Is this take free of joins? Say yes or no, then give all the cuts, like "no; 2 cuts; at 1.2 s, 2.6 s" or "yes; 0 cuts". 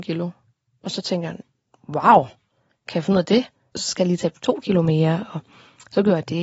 yes; 0 cuts